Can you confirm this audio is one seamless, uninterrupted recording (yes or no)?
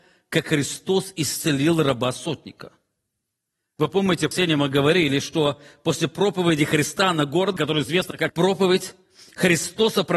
no